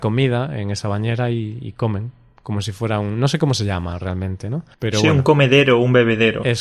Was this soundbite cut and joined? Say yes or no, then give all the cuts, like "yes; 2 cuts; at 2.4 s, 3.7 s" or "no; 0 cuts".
yes; 1 cut; at 4.7 s